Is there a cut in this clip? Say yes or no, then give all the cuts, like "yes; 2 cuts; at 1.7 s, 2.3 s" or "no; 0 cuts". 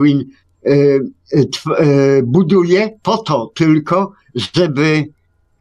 yes; 1 cut; at 3.0 s